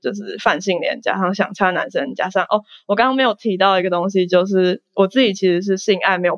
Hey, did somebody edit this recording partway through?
no; 0 cuts

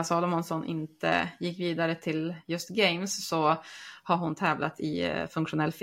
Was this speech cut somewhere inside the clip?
no; 0 cuts

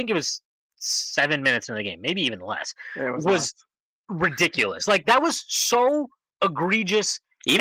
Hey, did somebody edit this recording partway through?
no; 0 cuts

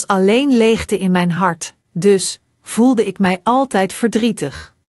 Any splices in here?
yes; 1 cut; at 1.8 s

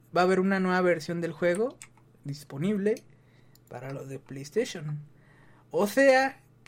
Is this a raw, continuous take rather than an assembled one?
yes; 0 cuts

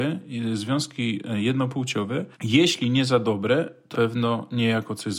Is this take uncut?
no; 2 cuts; at 2.3 s, 3.9 s

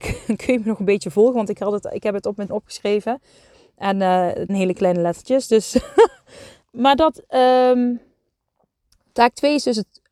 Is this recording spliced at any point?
yes; 3 cuts; at 2.5 s, 4.5 s, 6.6 s

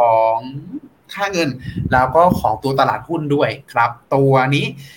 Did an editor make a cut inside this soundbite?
yes; 1 cut; at 4.0 s

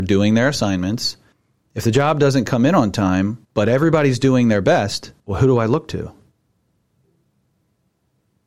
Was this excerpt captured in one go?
no; 3 cuts; at 1.3 s, 3.4 s, 5.2 s

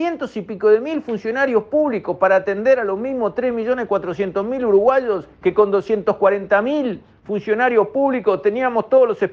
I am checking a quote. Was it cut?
yes; 1 cut; at 5.3 s

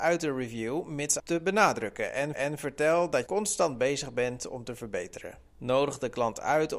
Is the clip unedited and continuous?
no; 4 cuts; at 1.2 s, 2.3 s, 3.3 s, 5.5 s

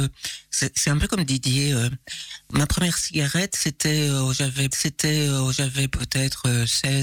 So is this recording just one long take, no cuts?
no; 1 cut; at 4.7 s

